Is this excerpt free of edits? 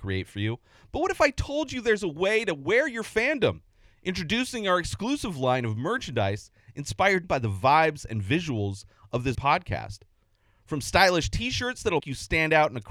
no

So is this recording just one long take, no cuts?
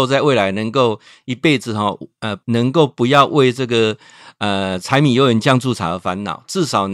no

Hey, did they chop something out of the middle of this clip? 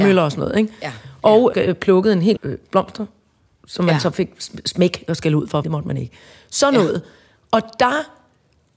yes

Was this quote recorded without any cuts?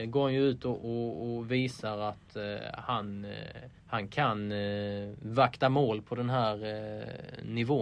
no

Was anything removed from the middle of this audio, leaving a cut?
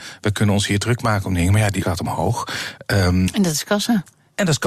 yes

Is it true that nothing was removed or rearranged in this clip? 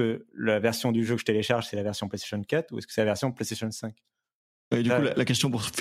yes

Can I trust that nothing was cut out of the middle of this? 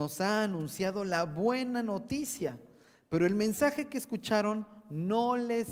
yes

